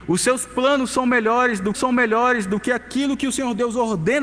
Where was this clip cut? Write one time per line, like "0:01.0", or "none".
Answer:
0:01.7